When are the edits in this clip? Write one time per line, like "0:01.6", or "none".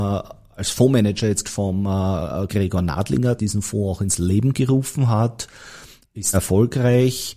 0:01.4
0:02.5
0:03.4
0:06.3